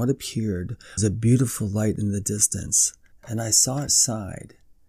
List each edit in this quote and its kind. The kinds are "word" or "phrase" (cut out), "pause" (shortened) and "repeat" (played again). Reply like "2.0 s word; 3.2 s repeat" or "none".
1.0 s word; 3.1 s pause; 3.9 s phrase